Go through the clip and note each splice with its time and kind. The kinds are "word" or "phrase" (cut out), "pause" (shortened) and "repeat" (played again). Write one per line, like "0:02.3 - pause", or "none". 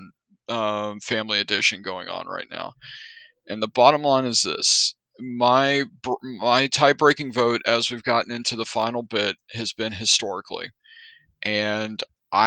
none